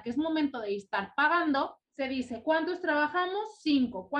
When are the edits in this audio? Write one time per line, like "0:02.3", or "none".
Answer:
0:01.8
0:02.4